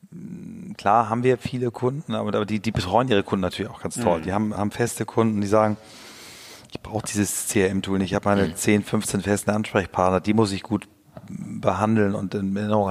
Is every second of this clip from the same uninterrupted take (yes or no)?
yes